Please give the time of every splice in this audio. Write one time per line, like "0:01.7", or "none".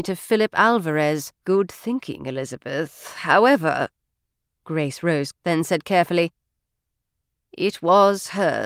0:01.3
0:05.3